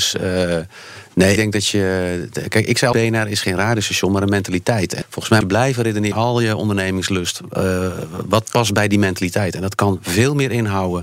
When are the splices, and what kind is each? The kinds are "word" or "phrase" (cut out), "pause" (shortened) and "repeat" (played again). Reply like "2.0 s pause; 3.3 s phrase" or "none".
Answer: 1.4 s word; 2.9 s word; 5.0 s word; 5.4 s word; 6.1 s word